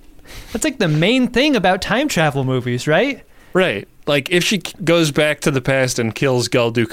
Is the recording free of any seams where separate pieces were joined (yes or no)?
yes